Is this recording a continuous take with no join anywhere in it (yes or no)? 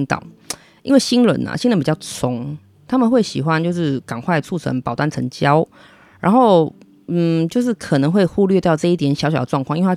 yes